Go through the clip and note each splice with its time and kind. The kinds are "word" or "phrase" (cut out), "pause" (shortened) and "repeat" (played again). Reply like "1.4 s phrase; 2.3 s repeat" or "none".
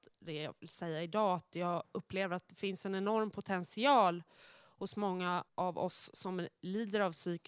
5.5 s pause